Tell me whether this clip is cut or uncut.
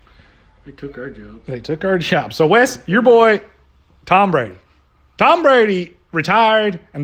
uncut